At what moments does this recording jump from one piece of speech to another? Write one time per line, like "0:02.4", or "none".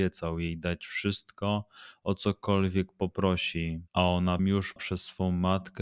0:03.9
0:04.4
0:04.8